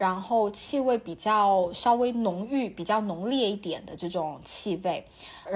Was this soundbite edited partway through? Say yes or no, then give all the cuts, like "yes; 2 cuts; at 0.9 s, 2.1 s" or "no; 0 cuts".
no; 0 cuts